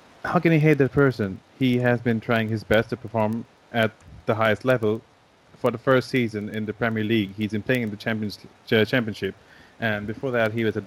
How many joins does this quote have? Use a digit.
0